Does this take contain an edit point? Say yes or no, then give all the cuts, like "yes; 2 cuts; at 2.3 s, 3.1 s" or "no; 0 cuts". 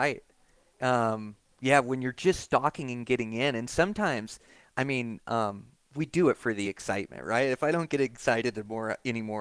no; 0 cuts